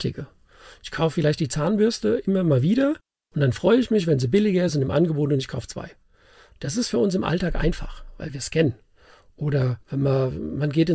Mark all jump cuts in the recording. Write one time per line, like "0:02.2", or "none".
none

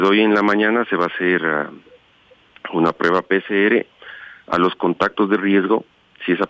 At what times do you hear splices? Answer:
none

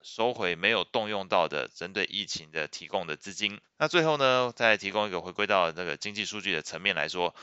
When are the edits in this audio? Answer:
0:03.6

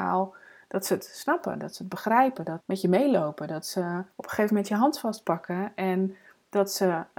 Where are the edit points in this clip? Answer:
0:02.6
0:04.1

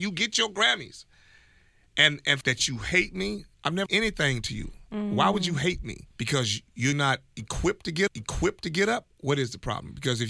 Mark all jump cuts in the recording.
0:02.4
0:03.5
0:03.9
0:06.1
0:06.9
0:08.1

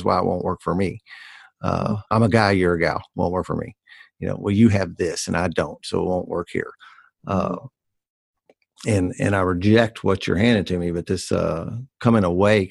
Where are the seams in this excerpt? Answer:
none

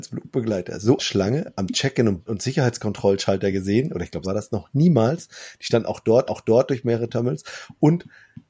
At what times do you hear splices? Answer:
0:01.0
0:02.3
0:04.2
0:06.3

